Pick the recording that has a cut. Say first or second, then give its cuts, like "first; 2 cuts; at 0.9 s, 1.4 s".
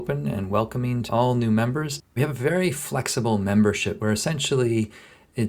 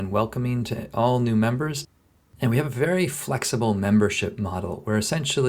first; 3 cuts; at 1.1 s, 2.2 s, 4.0 s